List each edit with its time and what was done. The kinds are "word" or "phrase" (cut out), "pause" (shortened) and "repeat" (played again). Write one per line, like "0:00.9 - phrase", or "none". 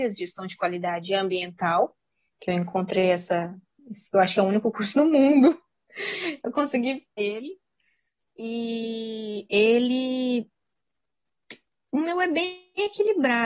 0:07.2 - word